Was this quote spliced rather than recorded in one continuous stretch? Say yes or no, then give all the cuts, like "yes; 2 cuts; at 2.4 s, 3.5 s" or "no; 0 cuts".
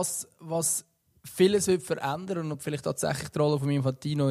no; 0 cuts